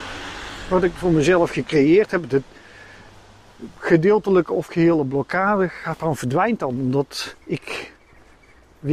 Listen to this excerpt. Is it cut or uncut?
cut